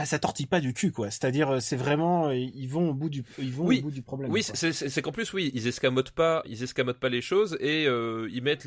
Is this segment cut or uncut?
cut